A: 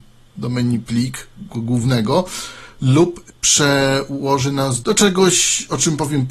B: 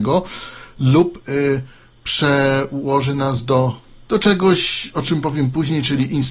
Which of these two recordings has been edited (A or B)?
A